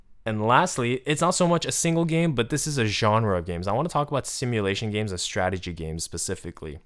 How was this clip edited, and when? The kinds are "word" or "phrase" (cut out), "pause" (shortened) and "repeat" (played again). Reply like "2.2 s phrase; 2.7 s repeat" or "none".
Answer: none